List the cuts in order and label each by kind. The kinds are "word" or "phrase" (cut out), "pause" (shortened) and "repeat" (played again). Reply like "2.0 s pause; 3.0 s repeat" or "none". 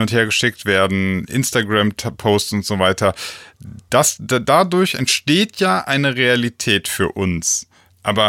none